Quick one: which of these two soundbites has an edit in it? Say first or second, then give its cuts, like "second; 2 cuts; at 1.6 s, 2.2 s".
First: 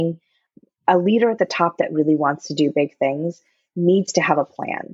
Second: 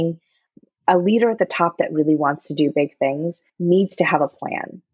second; 1 cut; at 3.5 s